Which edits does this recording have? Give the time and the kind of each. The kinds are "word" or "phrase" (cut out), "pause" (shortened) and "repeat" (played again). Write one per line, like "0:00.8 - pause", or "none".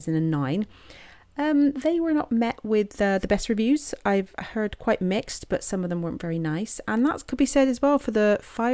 none

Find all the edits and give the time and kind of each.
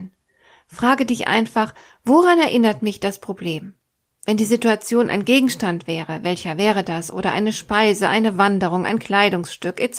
none

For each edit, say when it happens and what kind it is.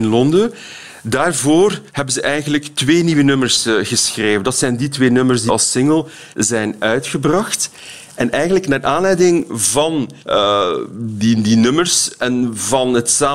0:01.9 - pause
0:05.5 - word
0:06.3 - pause
0:10.2 - pause

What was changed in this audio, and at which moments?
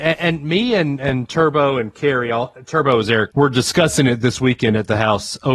0:03.3 - word

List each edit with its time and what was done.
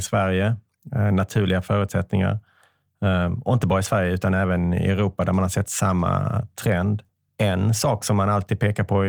0:07.1 - pause

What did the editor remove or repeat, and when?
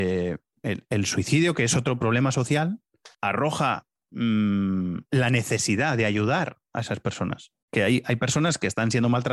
0:03.1 - pause
0:05.1 - pause
0:07.6 - pause

